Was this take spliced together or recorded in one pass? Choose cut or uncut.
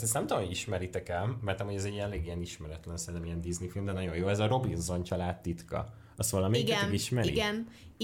uncut